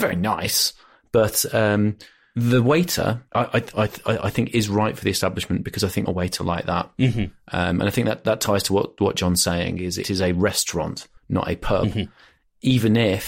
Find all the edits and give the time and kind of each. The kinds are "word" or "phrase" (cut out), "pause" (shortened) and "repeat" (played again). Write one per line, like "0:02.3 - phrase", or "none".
0:03.3 - pause
0:06.1 - phrase
0:10.0 - phrase
0:11.2 - pause